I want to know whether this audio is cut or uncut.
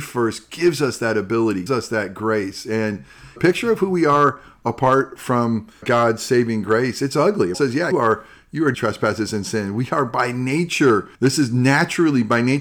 cut